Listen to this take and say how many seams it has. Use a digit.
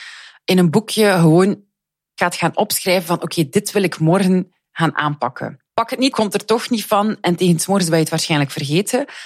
3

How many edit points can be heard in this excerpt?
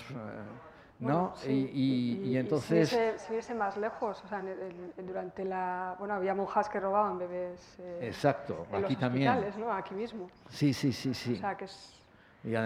0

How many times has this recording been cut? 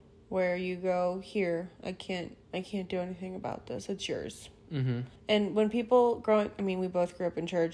2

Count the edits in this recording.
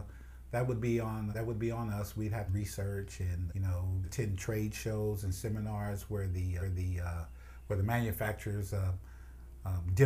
5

